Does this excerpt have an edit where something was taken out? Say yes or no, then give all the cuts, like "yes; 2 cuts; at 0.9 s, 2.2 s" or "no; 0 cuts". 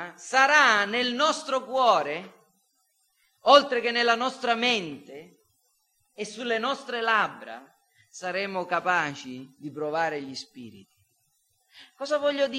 no; 0 cuts